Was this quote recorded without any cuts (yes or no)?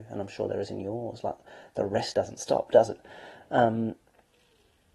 no